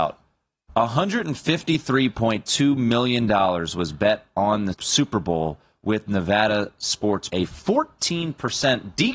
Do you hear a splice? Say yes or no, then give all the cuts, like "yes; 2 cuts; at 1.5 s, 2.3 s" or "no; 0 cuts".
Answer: yes; 2 cuts; at 4.7 s, 7.3 s